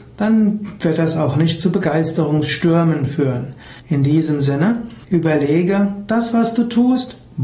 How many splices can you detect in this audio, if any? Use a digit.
2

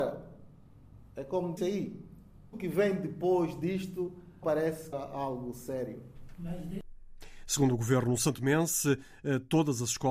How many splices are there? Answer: 4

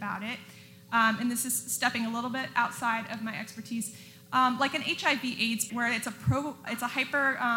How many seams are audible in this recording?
2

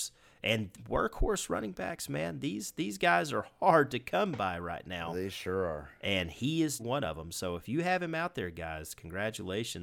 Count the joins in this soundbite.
1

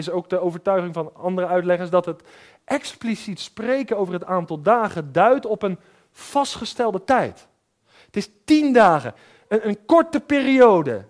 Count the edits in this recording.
0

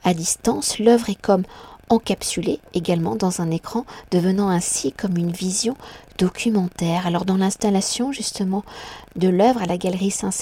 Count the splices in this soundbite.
0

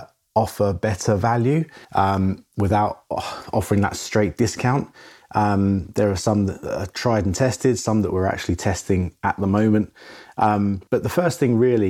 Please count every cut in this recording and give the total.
2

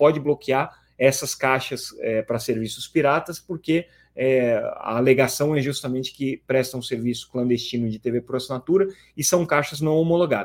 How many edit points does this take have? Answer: 0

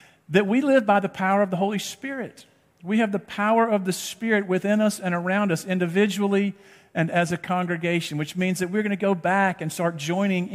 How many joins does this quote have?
0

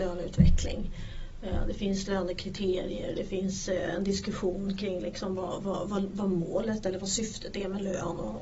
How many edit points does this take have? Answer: 0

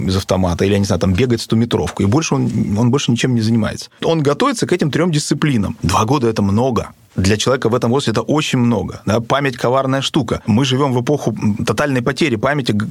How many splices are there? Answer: 1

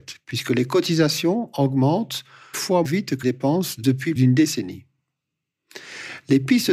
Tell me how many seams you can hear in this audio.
4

